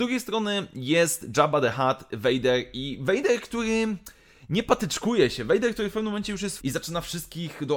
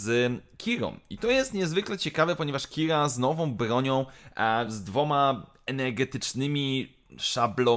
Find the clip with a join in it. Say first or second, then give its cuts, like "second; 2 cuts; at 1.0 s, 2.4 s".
first; 1 cut; at 6.6 s